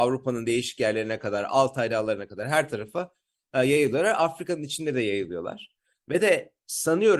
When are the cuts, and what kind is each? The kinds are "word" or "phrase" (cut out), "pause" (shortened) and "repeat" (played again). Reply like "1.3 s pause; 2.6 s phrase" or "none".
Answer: none